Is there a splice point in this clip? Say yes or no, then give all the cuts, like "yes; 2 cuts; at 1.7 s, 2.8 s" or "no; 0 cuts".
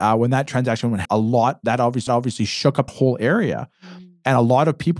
yes; 3 cuts; at 1.0 s, 2.1 s, 2.9 s